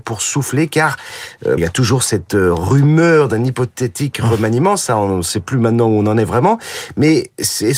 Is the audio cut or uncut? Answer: cut